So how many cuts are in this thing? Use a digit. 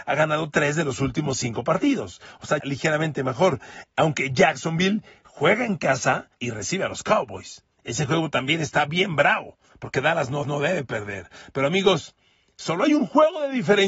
4